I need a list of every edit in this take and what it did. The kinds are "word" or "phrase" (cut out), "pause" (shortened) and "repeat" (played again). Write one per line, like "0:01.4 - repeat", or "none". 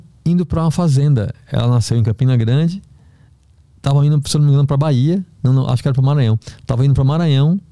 none